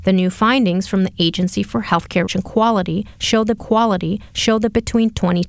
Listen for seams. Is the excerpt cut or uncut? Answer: cut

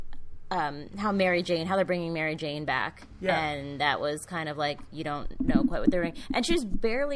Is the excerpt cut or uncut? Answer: uncut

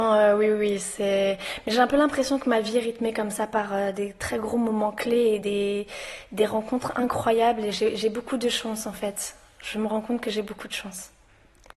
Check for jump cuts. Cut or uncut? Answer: uncut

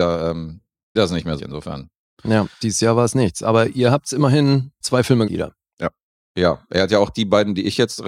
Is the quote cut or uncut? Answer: cut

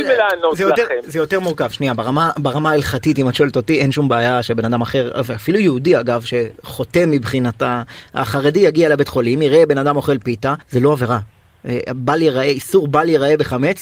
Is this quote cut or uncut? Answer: cut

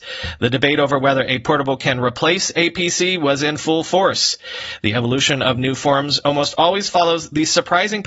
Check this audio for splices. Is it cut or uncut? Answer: uncut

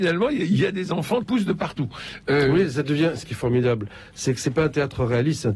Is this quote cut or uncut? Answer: cut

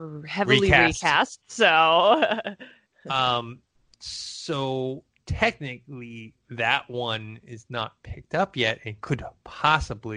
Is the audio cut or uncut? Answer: uncut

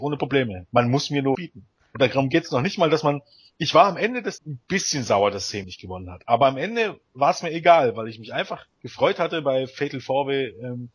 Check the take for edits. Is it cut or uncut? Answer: cut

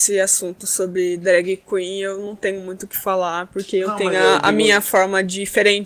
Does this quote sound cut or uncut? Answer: uncut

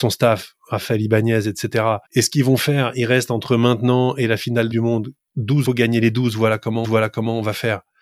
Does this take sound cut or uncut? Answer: cut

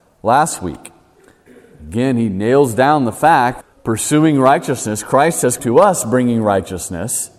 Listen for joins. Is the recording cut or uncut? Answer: cut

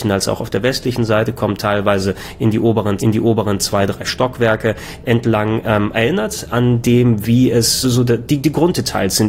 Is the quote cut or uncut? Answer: cut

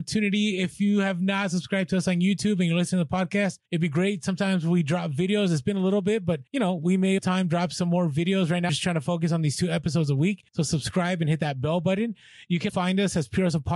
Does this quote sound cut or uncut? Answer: cut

